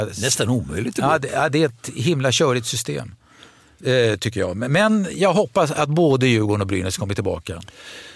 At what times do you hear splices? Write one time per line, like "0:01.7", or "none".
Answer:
none